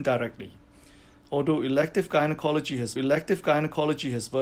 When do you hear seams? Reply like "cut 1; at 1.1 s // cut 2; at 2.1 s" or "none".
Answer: cut 1; at 3.0 s